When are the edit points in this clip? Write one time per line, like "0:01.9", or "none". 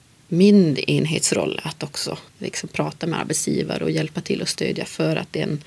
0:02.3